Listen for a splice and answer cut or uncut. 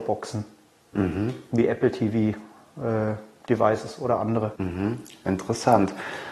cut